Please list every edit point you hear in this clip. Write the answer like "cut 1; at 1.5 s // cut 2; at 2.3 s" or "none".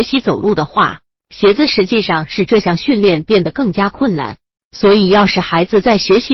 cut 1; at 4.6 s